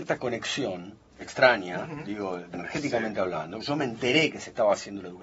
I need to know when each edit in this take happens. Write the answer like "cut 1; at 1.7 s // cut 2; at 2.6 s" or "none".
cut 1; at 2.5 s // cut 2; at 3.6 s